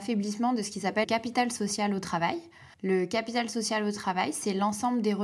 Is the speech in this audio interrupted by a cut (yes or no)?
yes